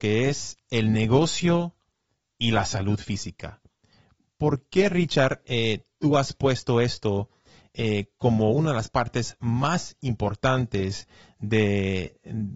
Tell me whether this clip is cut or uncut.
uncut